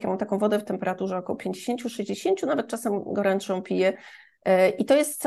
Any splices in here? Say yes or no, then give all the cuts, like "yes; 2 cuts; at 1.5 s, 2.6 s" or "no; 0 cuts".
no; 0 cuts